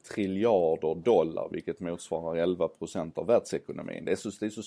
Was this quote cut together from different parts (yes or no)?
no